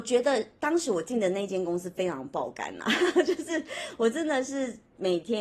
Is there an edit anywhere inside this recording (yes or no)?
no